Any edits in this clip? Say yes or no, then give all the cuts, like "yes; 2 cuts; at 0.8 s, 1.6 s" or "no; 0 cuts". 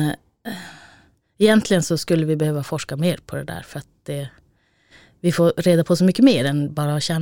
no; 0 cuts